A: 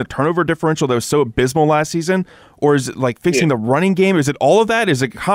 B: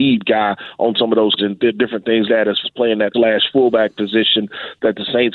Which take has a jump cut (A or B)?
B